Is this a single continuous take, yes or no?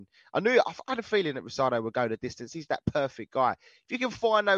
no